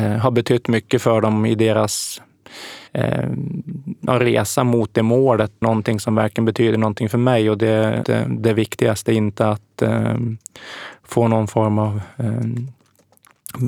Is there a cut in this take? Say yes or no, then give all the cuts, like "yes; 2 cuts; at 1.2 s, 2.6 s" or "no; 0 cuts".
yes; 3 cuts; at 2.9 s, 5.6 s, 8.0 s